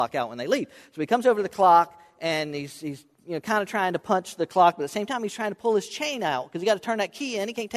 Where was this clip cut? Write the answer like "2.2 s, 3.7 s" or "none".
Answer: none